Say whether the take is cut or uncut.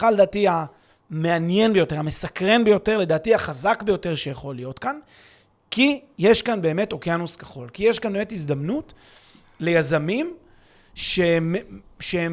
uncut